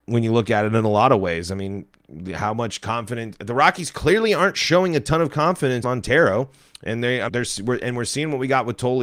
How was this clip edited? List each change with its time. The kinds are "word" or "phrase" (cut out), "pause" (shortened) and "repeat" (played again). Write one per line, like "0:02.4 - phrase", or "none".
0:05.8 - word
0:07.3 - word